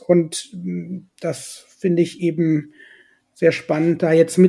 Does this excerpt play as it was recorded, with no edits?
yes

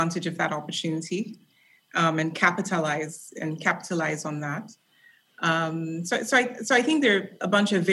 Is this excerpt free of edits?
yes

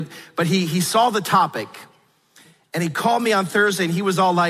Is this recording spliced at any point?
no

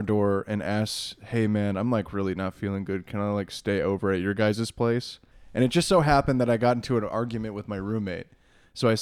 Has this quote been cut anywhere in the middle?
yes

